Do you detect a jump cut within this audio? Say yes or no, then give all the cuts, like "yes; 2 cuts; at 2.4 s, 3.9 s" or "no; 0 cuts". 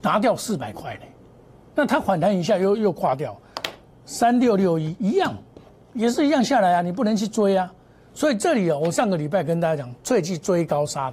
no; 0 cuts